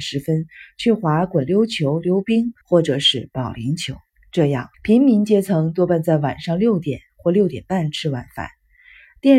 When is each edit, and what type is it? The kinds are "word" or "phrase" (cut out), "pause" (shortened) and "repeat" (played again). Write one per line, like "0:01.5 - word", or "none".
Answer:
0:02.6 - pause
0:04.1 - pause
0:04.7 - pause